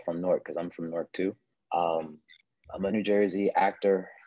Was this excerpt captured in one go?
no; 1 cut; at 2.9 s

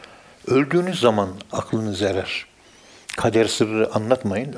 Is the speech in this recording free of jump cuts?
yes; 0 cuts

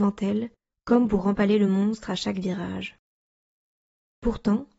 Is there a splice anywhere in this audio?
no; 0 cuts

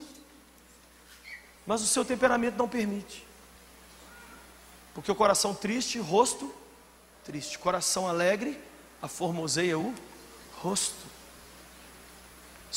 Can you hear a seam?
no; 0 cuts

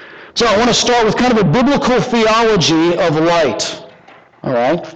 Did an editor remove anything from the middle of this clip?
no; 0 cuts

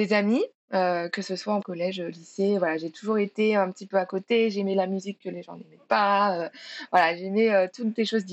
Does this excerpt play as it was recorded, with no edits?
no; 1 cut; at 1.6 s

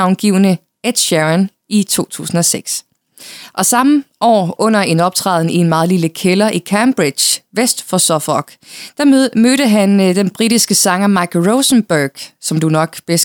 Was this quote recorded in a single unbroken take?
yes; 0 cuts

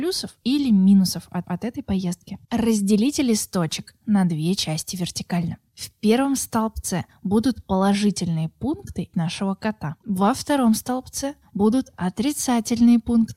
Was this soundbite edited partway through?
yes; 3 cuts; at 1.4 s, 2.4 s, 9.1 s

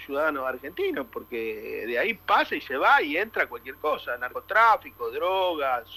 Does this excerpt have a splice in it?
no; 0 cuts

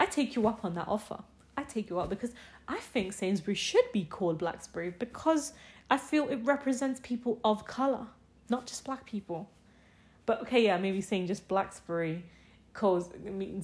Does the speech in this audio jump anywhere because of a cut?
no; 0 cuts

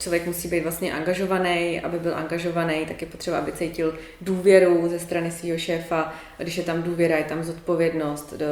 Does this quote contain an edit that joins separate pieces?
no; 0 cuts

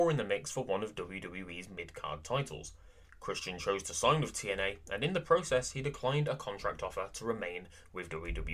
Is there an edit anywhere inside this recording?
no; 0 cuts

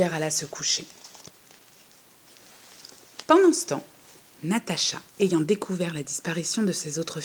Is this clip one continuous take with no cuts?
no; 1 cut; at 5.1 s

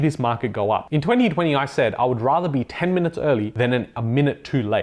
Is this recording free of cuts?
yes; 0 cuts

